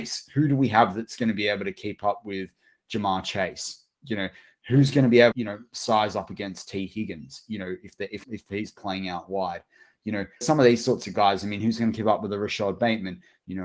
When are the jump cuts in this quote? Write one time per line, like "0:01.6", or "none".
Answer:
0:05.3
0:08.2
0:10.4